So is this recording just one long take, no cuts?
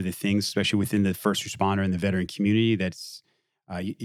yes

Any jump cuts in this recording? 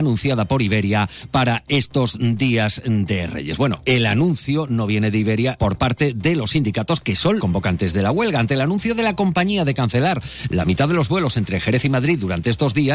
yes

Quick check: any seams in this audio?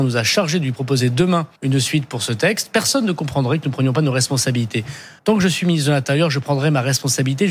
yes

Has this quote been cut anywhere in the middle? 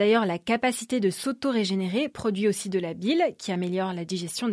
no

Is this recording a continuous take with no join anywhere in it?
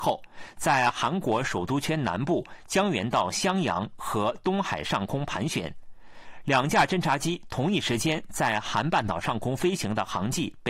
yes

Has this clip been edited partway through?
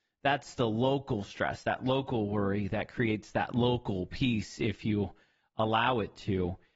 no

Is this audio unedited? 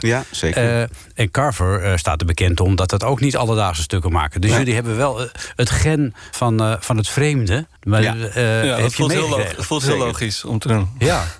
no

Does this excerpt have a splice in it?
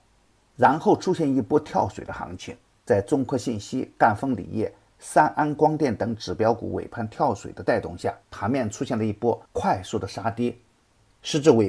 yes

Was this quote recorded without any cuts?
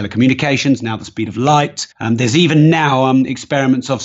no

